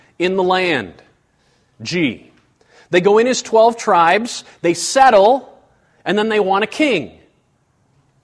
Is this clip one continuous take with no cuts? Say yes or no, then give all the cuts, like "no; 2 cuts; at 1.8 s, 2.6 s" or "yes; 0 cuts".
yes; 0 cuts